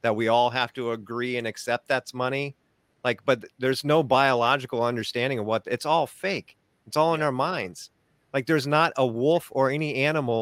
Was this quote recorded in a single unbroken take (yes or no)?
yes